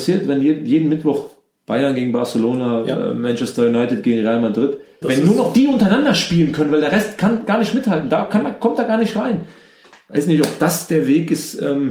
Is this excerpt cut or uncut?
cut